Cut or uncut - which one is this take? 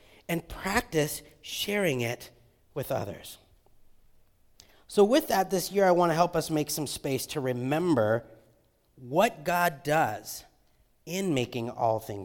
uncut